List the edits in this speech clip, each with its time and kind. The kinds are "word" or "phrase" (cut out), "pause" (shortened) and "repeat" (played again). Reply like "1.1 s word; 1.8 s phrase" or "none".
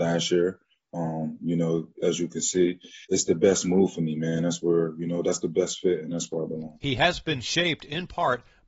3.0 s pause